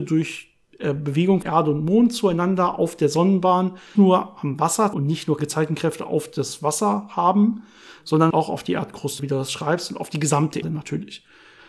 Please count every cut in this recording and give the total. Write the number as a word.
seven